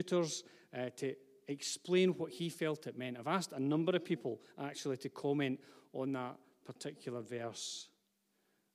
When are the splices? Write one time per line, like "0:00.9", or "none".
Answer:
none